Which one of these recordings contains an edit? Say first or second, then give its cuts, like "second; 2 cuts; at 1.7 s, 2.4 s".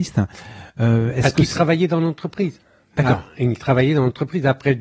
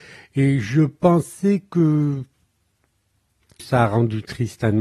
second; 1 cut; at 3.6 s